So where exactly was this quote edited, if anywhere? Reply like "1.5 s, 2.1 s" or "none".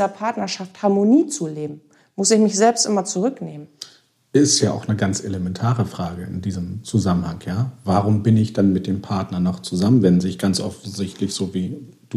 none